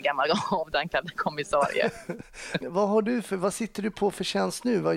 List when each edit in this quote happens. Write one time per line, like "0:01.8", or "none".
0:02.6